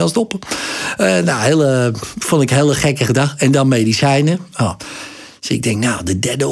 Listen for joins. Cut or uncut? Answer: uncut